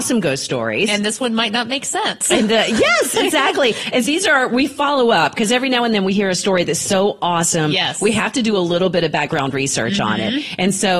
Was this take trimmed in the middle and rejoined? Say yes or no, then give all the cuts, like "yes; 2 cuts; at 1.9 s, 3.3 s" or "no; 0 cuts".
yes; 1 cut; at 4.0 s